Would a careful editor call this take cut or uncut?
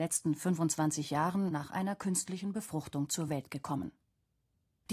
uncut